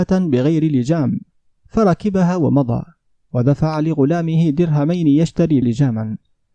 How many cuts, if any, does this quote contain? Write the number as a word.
one